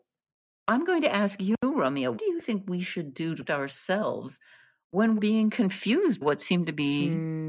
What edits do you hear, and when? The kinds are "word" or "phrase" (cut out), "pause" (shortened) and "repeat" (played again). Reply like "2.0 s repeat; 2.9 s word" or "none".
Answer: 2.2 s word; 3.5 s word; 5.2 s word; 6.2 s word